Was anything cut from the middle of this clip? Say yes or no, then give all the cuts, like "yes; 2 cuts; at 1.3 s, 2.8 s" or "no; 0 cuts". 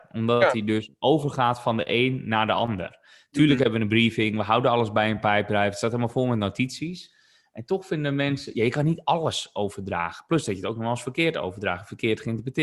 no; 0 cuts